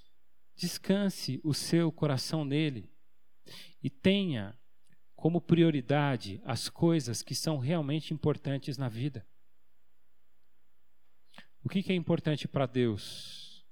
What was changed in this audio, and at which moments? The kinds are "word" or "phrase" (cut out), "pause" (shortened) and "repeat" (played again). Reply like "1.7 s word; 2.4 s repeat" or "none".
none